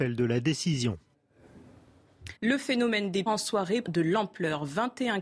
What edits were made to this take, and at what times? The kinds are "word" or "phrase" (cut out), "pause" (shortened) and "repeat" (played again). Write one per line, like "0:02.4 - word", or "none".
0:02.4 - pause
0:03.3 - word
0:03.8 - word